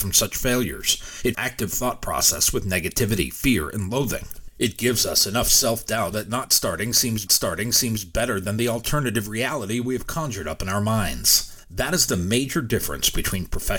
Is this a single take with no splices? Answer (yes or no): no